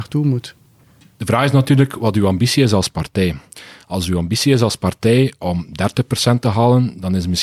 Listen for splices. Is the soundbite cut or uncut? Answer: uncut